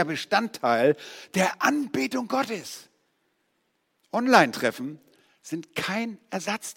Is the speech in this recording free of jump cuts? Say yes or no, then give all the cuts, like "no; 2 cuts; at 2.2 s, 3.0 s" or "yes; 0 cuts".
yes; 0 cuts